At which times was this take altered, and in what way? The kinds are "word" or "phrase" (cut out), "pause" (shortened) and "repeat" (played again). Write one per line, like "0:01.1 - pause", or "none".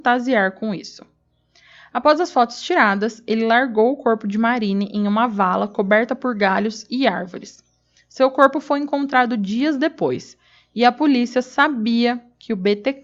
none